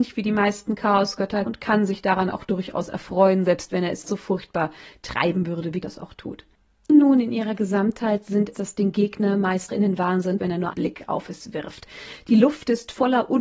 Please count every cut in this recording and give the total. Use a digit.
8